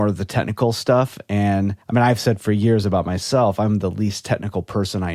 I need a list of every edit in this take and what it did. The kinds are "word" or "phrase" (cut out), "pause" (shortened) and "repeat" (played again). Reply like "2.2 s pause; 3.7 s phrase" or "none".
1.8 s pause